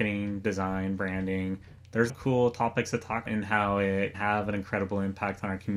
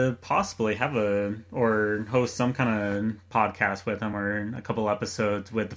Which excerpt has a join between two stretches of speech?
first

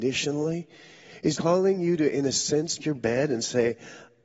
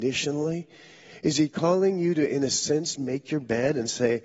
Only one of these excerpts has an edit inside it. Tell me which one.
first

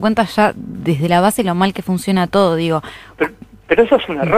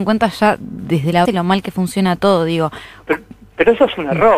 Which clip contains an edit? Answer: second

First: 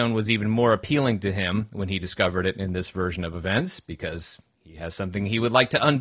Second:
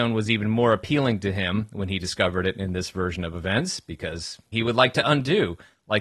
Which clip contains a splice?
second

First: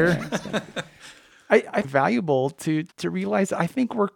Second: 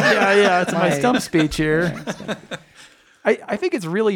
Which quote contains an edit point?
first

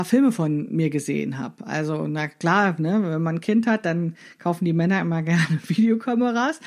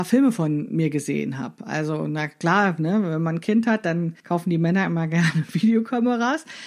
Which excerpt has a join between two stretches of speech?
second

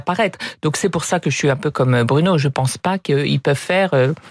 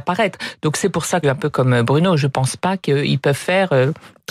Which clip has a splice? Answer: second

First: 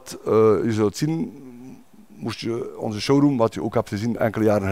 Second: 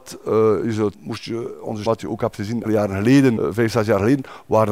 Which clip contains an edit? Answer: second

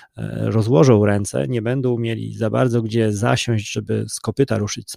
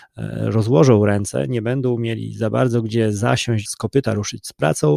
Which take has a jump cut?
second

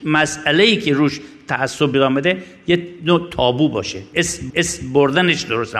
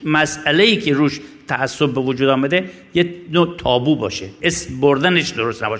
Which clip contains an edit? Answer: first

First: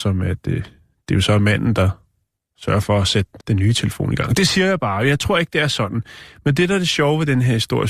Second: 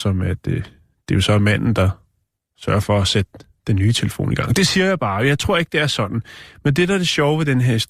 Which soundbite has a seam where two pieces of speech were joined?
first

